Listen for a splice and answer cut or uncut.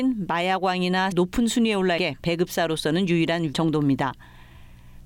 cut